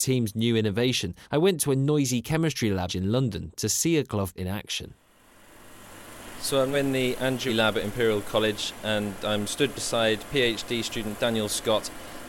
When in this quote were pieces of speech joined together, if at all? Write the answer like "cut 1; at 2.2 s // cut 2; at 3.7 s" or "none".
cut 1; at 1.2 s // cut 2; at 2.9 s // cut 3; at 4.4 s // cut 4; at 6.7 s // cut 5; at 7.5 s